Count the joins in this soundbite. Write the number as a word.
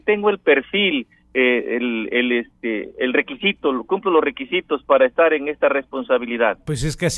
zero